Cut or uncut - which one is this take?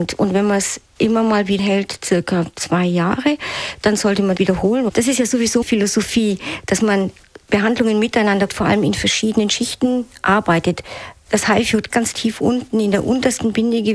cut